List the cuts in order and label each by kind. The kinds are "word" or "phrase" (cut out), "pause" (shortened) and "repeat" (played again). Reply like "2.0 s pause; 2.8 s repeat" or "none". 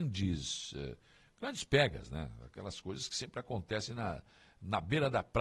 none